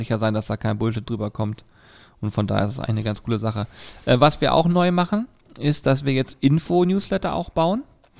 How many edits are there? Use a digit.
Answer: 0